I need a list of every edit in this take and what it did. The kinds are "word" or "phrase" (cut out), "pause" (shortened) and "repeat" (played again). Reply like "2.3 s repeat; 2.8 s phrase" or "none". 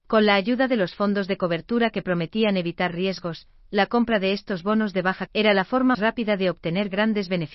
5.3 s word; 5.9 s word